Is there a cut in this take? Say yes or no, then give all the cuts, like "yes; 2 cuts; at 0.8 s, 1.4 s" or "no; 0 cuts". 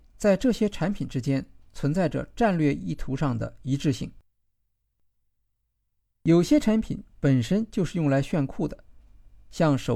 no; 0 cuts